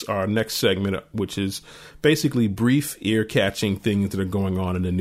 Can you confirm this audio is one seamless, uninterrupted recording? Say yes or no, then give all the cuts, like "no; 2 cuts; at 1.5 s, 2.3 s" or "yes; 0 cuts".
yes; 0 cuts